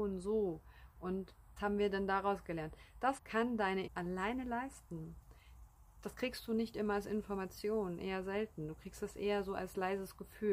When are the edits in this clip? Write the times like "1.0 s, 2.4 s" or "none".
1.6 s, 3.2 s, 3.9 s